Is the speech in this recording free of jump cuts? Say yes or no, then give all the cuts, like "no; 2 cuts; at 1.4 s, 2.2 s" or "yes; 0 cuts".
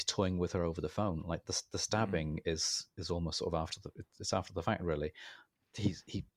yes; 0 cuts